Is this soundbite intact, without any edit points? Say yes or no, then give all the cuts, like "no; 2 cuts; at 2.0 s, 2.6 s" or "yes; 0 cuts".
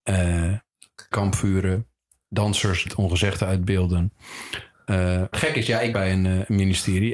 no; 4 cuts; at 1.1 s, 2.9 s, 5.3 s, 5.9 s